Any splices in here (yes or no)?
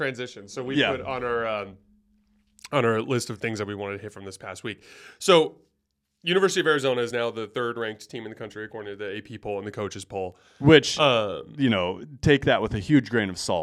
no